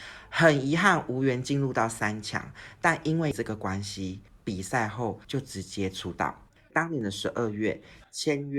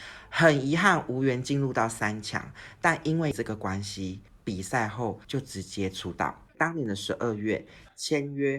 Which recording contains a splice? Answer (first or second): second